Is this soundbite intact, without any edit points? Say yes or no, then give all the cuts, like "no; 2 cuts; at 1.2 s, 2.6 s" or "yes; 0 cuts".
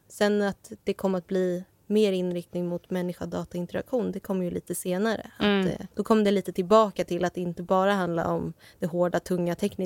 no; 1 cut; at 5.9 s